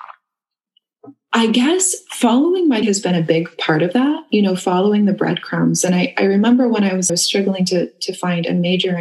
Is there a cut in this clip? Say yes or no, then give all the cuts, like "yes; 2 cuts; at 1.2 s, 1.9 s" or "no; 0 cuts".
yes; 2 cuts; at 2.8 s, 7.1 s